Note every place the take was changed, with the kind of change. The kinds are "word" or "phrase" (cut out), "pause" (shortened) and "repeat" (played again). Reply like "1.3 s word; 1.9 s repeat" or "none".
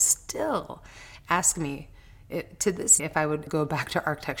3.0 s word; 3.5 s word